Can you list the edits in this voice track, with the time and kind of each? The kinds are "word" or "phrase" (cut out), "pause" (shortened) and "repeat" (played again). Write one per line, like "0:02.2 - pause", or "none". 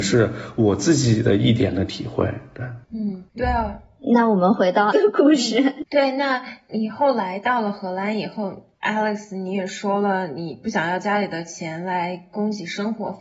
0:03.3 - pause
0:04.9 - word
0:05.9 - pause
0:08.7 - pause

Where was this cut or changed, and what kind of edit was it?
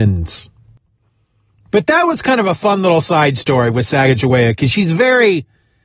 none

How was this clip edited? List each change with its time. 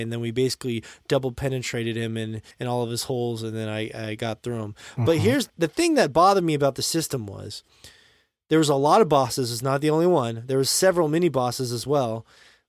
0:02.5 - pause

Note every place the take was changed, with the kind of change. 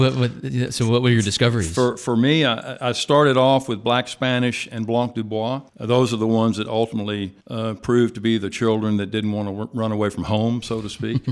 0:05.7 - pause
0:07.4 - pause

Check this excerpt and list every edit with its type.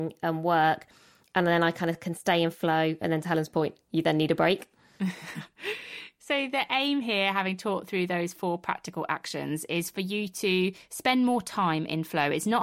none

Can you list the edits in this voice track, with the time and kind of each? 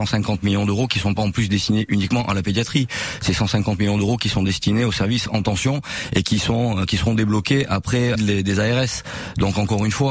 0:08.2 - word

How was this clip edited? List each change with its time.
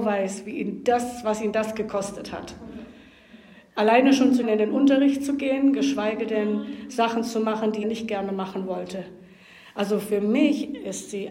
0:04.4 - phrase
0:07.8 - word

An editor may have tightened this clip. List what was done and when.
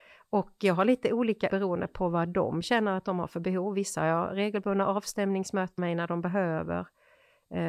0:01.5 - word
0:05.8 - phrase

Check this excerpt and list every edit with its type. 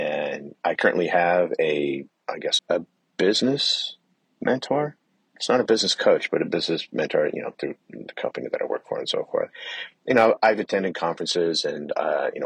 0:02.6 - word
0:04.1 - pause
0:07.8 - pause

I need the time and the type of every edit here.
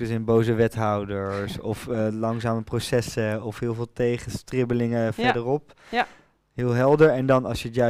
none

